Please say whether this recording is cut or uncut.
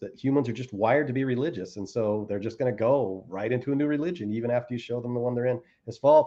uncut